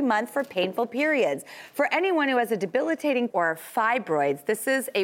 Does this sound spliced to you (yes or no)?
yes